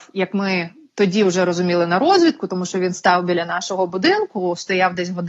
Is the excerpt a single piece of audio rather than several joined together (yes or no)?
yes